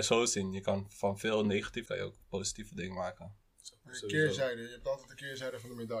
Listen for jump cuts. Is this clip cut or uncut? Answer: cut